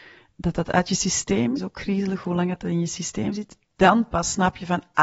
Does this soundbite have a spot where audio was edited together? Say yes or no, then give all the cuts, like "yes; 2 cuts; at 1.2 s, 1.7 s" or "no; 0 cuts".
yes; 1 cut; at 1.6 s